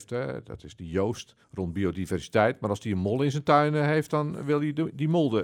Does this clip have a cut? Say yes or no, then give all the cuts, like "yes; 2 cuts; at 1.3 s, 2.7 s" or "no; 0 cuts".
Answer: yes; 1 cut; at 1.4 s